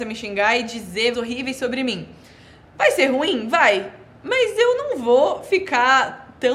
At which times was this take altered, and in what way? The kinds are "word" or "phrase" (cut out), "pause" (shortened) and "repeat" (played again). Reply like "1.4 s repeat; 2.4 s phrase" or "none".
1.1 s phrase